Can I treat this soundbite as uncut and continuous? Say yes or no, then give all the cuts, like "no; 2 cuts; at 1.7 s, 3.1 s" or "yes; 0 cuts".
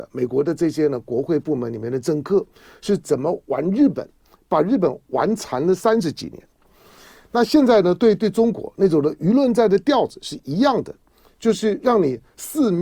yes; 0 cuts